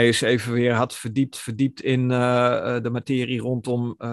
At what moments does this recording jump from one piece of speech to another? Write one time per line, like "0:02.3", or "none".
0:01.3